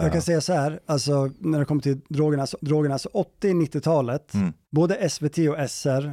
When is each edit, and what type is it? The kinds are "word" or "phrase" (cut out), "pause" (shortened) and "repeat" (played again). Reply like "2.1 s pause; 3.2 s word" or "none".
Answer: 2.6 s repeat; 4.6 s pause